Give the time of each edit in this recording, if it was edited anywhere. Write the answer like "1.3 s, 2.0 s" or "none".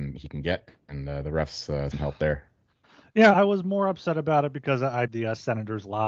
1.9 s, 3.3 s, 5.1 s

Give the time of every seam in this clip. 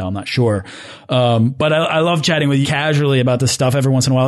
2.6 s

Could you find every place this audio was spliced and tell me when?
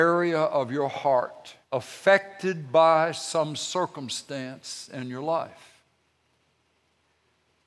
1.6 s

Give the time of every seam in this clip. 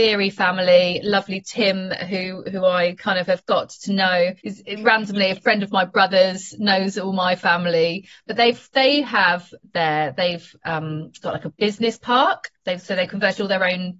4.4 s, 12.6 s

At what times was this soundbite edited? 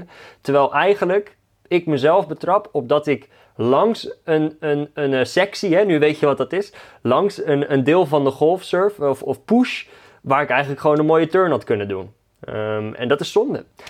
none

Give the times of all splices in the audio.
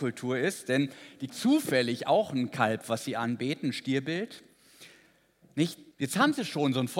1.3 s, 5.9 s

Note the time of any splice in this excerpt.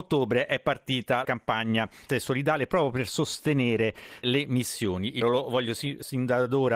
1.2 s, 2.1 s, 4.2 s, 5.2 s

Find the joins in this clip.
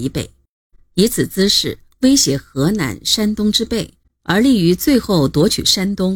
none

